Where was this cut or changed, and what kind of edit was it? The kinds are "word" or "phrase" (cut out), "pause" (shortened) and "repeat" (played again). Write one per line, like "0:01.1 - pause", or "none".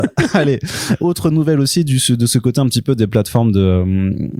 none